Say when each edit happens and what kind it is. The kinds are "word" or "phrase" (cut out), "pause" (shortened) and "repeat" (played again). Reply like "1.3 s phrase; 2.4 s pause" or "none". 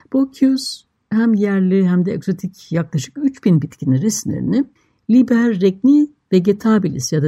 4.8 s pause